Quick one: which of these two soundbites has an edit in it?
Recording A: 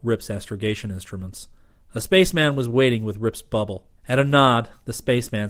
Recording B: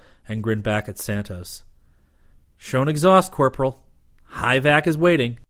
A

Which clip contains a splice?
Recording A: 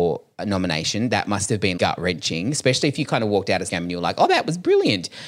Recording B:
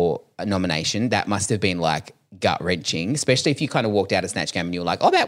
A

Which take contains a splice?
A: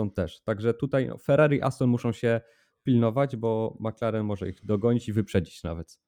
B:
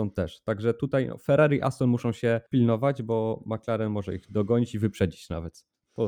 B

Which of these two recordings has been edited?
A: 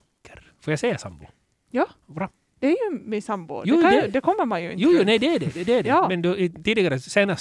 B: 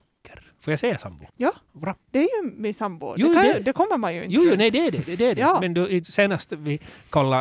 B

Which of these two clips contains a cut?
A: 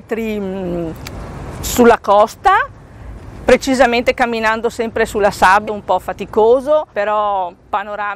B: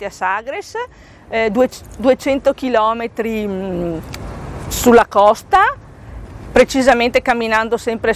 A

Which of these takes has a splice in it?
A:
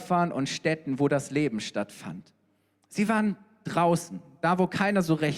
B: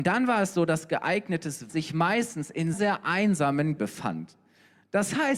B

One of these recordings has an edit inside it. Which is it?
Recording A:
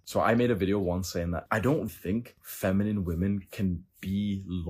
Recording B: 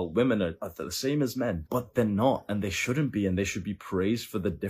A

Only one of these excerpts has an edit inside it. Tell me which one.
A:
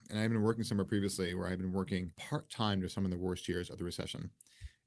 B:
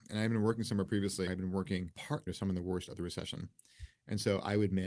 B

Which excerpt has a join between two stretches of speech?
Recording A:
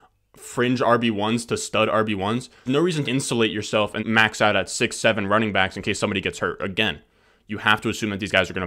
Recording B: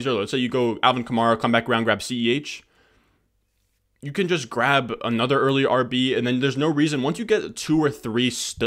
A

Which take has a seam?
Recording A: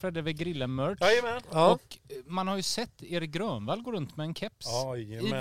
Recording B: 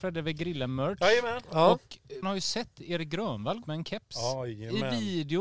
B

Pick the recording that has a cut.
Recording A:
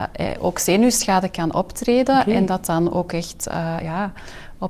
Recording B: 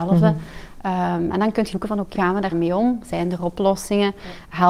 B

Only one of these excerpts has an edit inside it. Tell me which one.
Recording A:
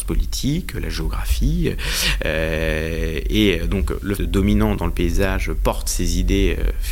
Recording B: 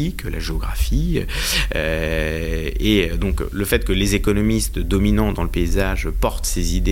A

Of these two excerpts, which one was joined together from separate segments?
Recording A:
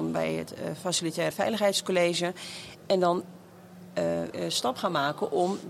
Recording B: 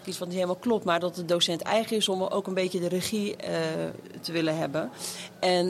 A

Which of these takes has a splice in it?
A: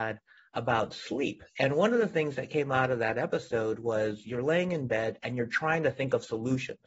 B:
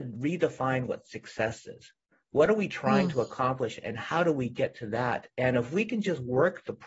A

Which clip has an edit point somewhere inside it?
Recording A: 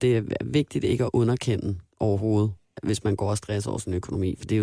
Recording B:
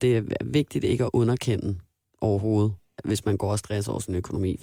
A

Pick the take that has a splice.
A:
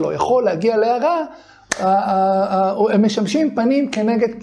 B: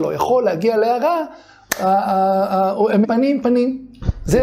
B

